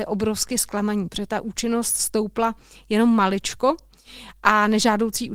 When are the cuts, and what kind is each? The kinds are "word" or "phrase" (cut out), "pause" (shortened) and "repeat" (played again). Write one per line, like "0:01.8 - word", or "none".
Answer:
none